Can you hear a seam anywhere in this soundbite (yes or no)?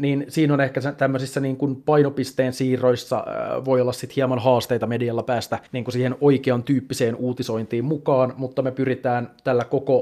yes